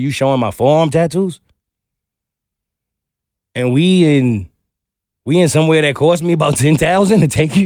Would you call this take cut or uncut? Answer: uncut